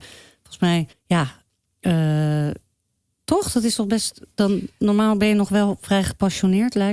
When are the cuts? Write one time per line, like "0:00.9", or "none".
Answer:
0:00.9